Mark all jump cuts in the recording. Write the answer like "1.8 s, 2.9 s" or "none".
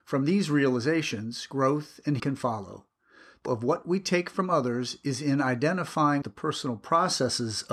2.2 s, 3.5 s, 6.2 s